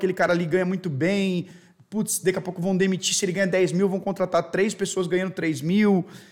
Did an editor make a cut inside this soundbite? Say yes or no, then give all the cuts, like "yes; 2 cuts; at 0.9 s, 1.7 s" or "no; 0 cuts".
no; 0 cuts